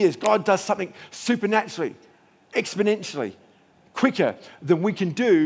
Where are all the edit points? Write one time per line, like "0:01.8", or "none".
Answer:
none